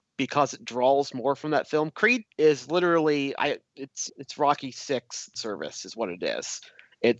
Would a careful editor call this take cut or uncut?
cut